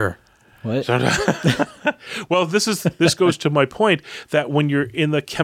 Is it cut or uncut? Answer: uncut